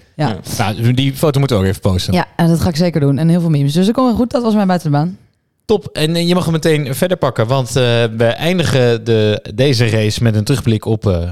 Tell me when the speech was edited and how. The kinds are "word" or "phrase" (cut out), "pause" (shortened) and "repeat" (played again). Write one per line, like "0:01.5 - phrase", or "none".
none